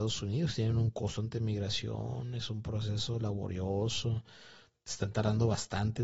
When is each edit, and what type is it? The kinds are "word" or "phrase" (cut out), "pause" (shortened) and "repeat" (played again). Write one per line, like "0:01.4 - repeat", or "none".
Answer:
none